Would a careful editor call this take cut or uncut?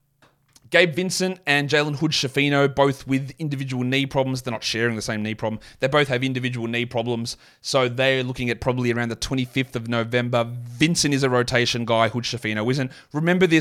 uncut